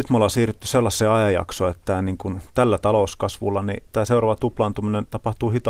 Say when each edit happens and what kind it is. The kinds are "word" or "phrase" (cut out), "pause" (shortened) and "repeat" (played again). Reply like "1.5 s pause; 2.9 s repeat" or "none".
3.9 s pause